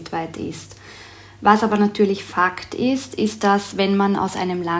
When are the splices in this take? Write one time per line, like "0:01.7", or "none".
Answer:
none